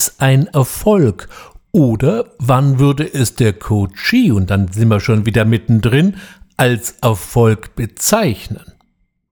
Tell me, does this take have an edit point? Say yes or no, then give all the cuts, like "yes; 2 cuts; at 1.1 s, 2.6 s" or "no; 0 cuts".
no; 0 cuts